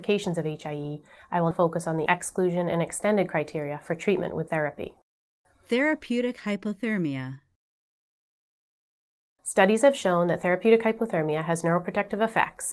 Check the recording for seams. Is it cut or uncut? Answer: cut